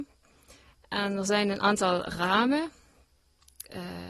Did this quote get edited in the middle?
no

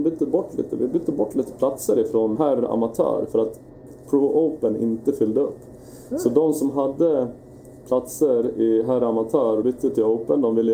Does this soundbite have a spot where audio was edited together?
yes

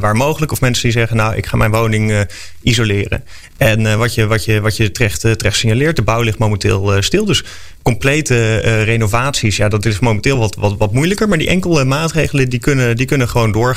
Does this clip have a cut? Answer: no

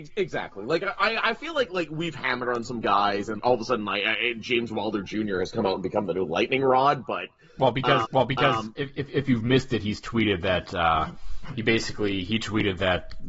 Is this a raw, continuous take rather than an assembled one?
no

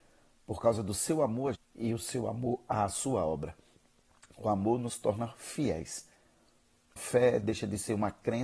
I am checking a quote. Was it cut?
yes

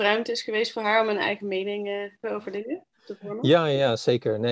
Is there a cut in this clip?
yes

